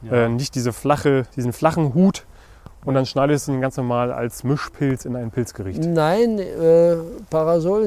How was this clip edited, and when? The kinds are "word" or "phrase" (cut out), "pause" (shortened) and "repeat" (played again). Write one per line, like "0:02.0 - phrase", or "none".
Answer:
0:01.3 - pause